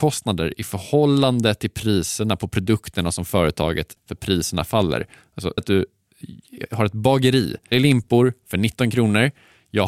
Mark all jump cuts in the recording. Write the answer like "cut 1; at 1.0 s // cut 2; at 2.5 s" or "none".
cut 1; at 4.0 s // cut 2; at 5.6 s // cut 3; at 7.7 s